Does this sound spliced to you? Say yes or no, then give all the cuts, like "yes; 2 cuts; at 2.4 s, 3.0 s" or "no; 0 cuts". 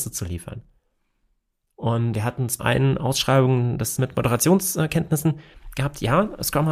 yes; 3 cuts; at 2.1 s, 2.6 s, 4.0 s